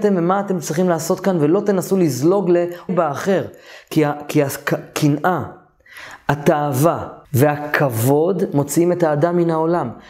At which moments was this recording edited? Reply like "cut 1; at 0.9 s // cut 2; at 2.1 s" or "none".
cut 1; at 2.9 s // cut 2; at 7.2 s

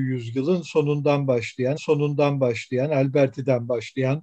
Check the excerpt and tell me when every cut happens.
cut 1; at 1.8 s

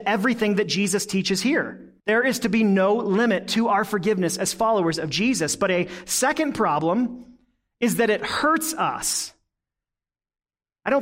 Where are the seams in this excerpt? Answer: cut 1; at 2.0 s

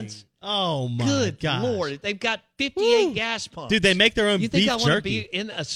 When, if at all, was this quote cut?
none

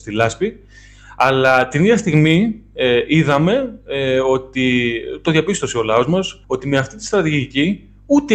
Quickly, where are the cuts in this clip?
cut 1; at 6.4 s

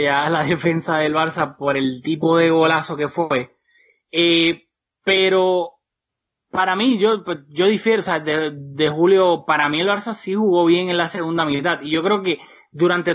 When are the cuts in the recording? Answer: none

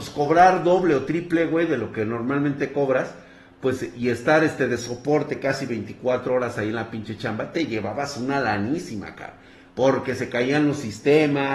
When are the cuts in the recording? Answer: none

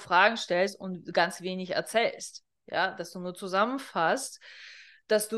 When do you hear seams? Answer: none

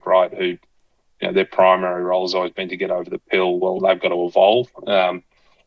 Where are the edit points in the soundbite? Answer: none

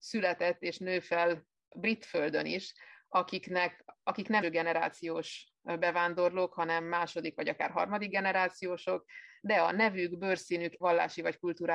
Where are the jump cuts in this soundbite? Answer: cut 1; at 4.4 s // cut 2; at 10.8 s

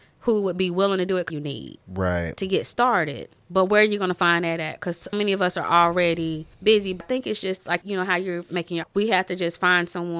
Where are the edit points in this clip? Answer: cut 1; at 1.3 s // cut 2; at 1.8 s // cut 3; at 3.4 s // cut 4; at 5.1 s // cut 5; at 6.5 s // cut 6; at 7.0 s // cut 7; at 7.8 s // cut 8; at 8.8 s

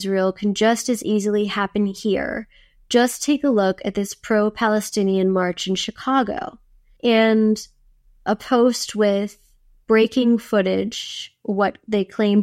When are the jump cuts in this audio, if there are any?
none

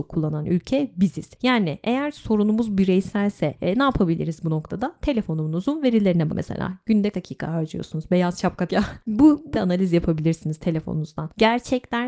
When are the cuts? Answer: cut 1; at 6.3 s // cut 2; at 7.1 s // cut 3; at 8.7 s // cut 4; at 9.5 s

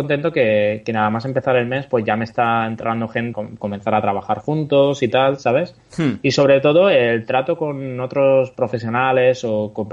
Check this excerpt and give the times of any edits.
cut 1; at 3.3 s

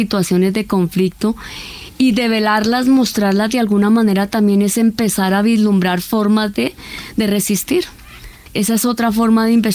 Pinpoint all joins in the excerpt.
none

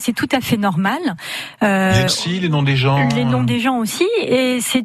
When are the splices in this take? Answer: cut 1; at 2.1 s

